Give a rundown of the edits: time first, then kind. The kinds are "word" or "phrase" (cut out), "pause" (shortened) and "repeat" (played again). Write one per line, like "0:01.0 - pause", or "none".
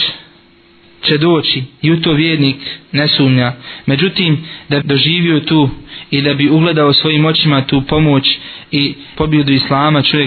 0:04.8 - word
0:09.1 - word